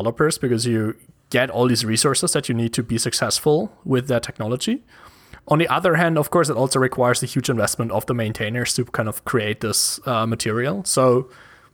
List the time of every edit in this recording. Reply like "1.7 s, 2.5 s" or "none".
none